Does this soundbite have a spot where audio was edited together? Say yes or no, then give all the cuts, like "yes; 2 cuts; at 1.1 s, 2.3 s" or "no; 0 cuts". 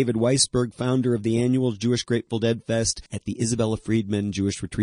yes; 1 cut; at 3.1 s